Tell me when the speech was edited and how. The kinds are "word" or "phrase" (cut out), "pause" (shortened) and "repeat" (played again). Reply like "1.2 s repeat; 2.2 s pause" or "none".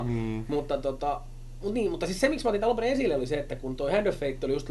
none